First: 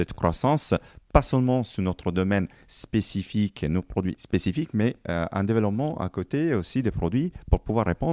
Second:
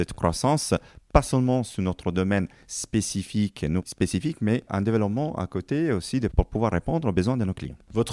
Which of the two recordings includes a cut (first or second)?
second